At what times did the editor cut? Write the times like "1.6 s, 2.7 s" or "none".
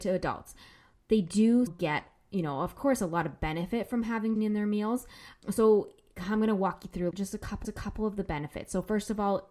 1.7 s, 4.4 s, 7.1 s, 7.6 s